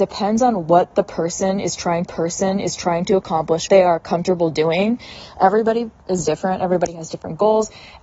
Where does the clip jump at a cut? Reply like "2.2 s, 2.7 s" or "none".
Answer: 2.1 s, 3.7 s